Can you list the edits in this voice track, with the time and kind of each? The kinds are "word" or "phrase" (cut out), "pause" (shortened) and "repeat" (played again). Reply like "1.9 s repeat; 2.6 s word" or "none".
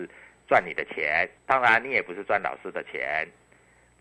1.4 s pause